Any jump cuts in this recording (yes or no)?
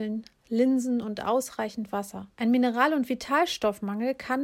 yes